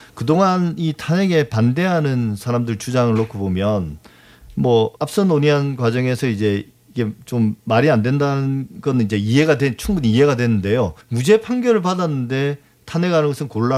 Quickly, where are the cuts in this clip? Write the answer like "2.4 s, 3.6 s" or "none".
5.0 s, 7.6 s, 11.0 s